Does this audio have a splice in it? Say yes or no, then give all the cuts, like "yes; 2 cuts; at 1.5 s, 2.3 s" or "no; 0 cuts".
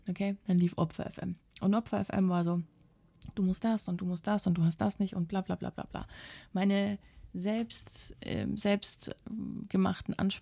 yes; 1 cut; at 1.4 s